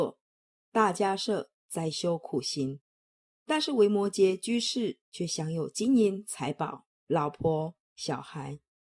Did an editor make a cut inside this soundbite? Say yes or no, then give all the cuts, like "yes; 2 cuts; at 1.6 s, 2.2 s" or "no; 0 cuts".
yes; 2 cuts; at 5.0 s, 6.9 s